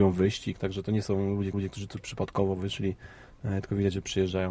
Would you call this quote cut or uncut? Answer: cut